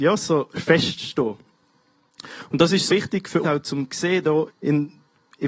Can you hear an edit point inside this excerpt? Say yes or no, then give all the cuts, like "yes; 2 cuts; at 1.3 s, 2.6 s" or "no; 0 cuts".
yes; 3 cuts; at 2.9 s, 3.4 s, 4.5 s